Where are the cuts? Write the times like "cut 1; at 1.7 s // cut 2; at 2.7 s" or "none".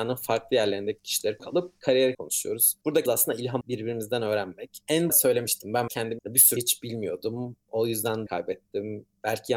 cut 1; at 1.4 s // cut 2; at 2.1 s // cut 3; at 3.1 s // cut 4; at 3.6 s // cut 5; at 5.1 s // cut 6; at 5.9 s // cut 7; at 6.2 s // cut 8; at 6.6 s // cut 9; at 8.3 s